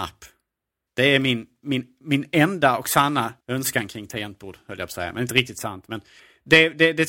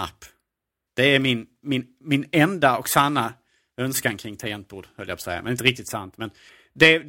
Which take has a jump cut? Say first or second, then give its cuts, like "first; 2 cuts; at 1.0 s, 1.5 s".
first; 1 cut; at 3.4 s